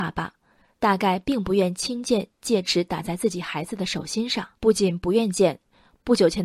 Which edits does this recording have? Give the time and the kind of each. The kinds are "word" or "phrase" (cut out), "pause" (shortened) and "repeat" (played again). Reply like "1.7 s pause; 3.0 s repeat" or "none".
4.6 s pause

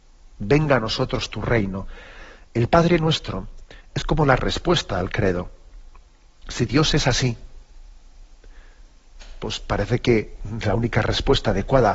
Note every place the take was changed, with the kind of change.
none

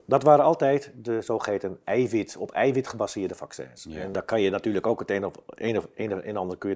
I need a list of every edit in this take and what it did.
4.1 s word

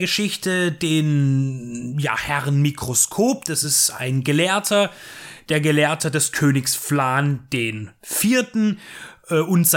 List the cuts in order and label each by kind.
none

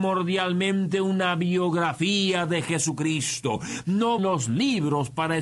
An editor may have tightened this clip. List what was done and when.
4.2 s word

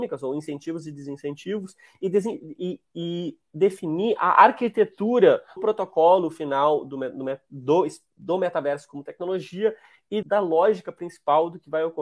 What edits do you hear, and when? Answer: 5.6 s word; 10.2 s word

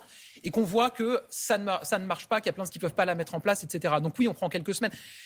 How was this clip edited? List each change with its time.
2.7 s word

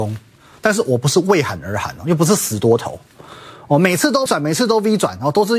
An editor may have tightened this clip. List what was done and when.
4.3 s word

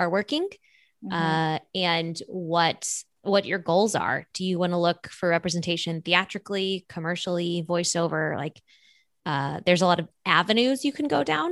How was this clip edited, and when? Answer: none

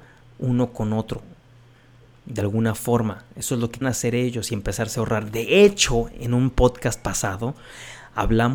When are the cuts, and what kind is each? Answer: 3.8 s word

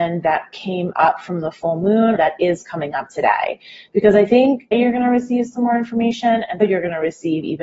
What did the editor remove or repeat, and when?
2.1 s word; 4.7 s word; 6.6 s word

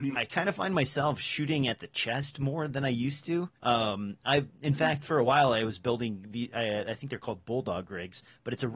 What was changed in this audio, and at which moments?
3.6 s pause

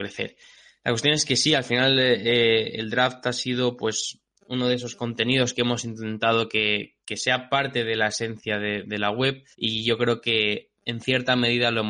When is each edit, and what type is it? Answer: 7.0 s pause; 9.5 s pause

